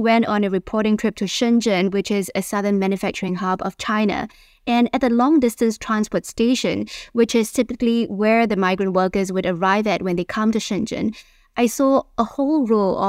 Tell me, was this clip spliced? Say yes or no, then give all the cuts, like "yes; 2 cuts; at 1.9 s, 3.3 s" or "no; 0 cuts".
no; 0 cuts